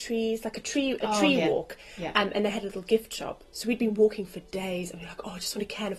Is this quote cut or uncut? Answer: uncut